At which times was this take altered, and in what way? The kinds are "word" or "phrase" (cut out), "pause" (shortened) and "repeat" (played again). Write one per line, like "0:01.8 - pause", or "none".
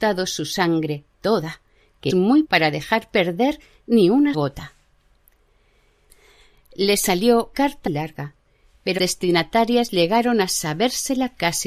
0:02.1 - word
0:02.4 - word
0:04.3 - word
0:07.5 - word
0:07.9 - word
0:09.0 - word